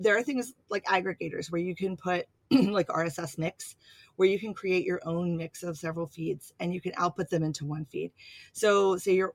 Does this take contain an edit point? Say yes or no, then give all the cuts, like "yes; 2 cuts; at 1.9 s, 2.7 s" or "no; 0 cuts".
no; 0 cuts